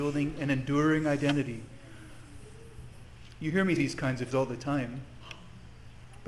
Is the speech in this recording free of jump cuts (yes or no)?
no